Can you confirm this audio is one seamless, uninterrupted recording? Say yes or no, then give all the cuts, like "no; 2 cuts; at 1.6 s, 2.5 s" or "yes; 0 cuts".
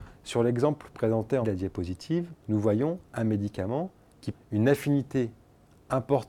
no; 3 cuts; at 1.4 s, 2.4 s, 4.3 s